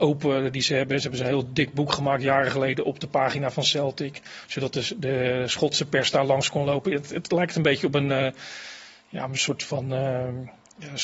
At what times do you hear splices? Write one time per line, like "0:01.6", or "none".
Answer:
none